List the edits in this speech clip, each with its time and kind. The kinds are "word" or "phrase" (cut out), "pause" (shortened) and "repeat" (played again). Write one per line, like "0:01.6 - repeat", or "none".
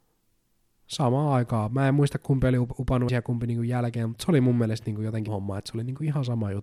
0:03.1 - word
0:05.3 - word

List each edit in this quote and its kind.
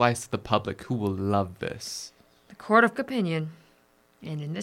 0:03.0 - word

